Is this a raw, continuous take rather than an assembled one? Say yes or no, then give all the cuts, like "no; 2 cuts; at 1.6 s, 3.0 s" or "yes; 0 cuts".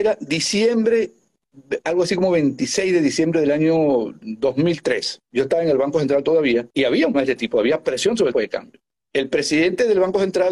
no; 5 cuts; at 5.2 s, 6.7 s, 7.1 s, 8.3 s, 9.0 s